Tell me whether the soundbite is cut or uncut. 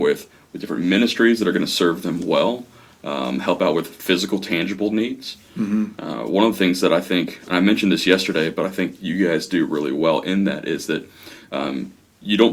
uncut